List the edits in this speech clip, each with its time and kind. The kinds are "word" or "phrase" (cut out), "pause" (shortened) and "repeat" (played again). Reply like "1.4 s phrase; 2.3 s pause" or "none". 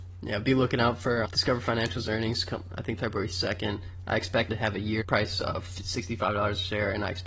1.2 s word; 3.0 s phrase; 4.5 s word; 5.0 s word